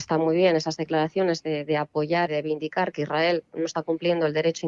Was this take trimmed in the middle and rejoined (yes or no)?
yes